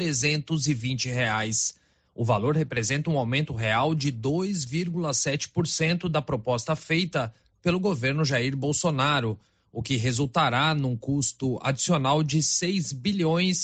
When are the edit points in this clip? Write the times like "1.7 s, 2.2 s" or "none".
none